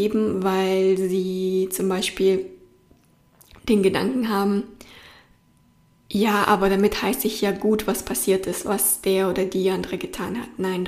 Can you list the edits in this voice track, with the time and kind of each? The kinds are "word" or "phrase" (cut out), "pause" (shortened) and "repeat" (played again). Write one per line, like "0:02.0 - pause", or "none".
none